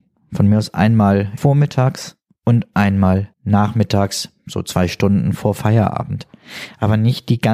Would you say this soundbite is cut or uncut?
cut